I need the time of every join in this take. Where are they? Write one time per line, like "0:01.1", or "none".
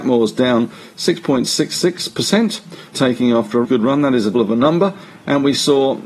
0:02.9
0:03.6
0:04.3

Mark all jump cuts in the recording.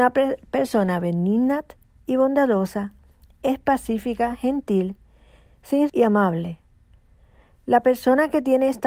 0:05.9

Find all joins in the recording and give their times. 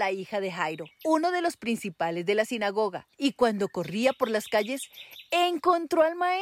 0:00.9
0:03.1

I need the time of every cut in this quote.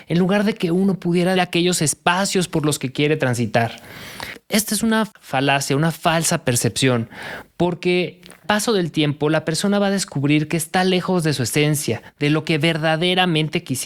0:01.4
0:08.4

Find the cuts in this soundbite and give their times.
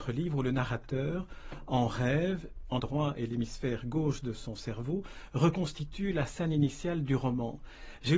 0:02.8

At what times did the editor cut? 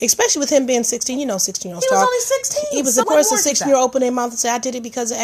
0:03.0

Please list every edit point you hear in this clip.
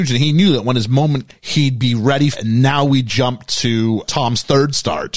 0:01.3
0:02.3
0:04.0

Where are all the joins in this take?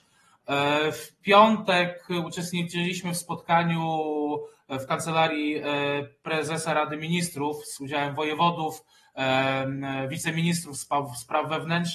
none

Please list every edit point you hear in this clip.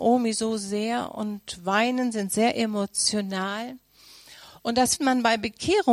0:05.0

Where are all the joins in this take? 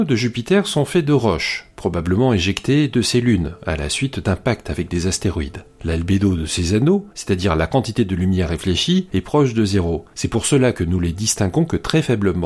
none

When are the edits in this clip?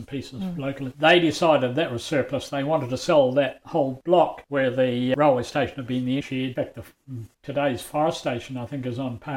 0:06.2
0:07.3

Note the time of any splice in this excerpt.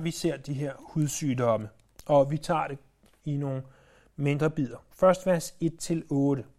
none

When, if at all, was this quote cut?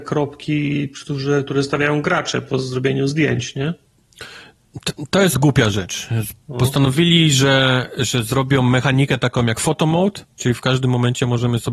0:05.3

